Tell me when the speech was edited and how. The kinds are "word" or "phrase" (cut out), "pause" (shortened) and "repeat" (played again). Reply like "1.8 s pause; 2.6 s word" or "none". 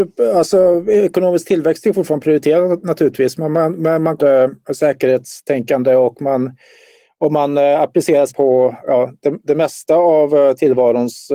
4.2 s phrase; 8.3 s word